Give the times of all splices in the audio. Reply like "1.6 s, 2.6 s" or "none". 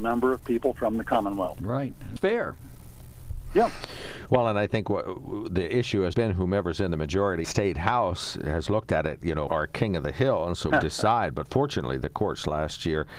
2.2 s, 6.1 s, 7.4 s, 8.7 s, 9.5 s, 10.7 s